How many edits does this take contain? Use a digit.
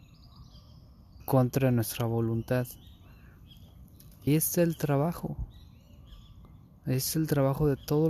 2